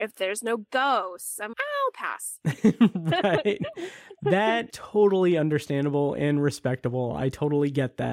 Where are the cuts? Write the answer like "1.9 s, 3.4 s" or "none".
1.5 s, 4.7 s